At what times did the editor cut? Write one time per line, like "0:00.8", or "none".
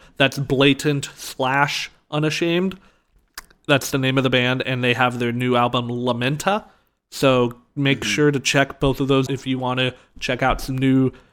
0:09.3